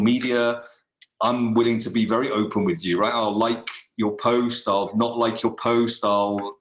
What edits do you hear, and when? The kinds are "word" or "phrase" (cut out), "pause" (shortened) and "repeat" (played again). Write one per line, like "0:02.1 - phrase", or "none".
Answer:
none